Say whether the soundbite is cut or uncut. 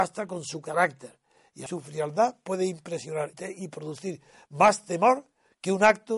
cut